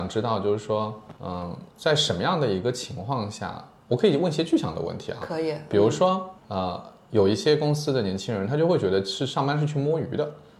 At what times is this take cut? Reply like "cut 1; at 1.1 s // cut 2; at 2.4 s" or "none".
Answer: cut 1; at 1.2 s // cut 2; at 1.7 s // cut 3; at 6.4 s